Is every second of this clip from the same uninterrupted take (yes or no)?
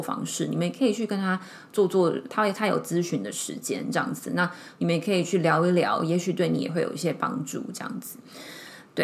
no